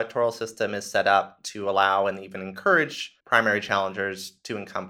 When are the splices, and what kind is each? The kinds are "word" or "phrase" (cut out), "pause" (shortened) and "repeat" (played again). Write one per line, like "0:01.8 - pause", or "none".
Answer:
0:03.2 - pause